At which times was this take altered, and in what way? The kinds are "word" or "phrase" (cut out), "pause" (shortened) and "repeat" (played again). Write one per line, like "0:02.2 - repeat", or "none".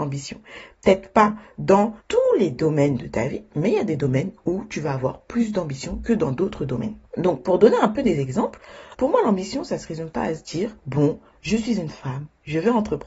0:02.0 - pause
0:07.1 - pause
0:10.8 - pause

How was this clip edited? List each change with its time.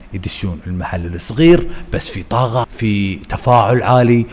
0:02.6 - word

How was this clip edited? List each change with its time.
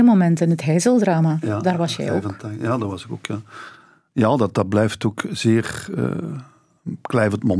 0:04.5 - word

